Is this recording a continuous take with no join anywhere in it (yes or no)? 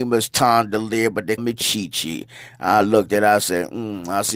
no